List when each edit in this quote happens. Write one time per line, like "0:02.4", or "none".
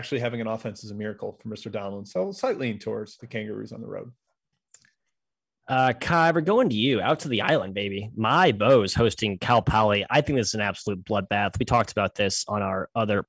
none